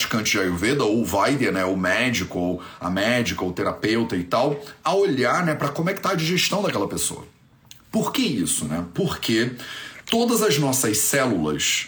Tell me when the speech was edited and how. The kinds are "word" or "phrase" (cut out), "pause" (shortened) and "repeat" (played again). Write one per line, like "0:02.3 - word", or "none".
none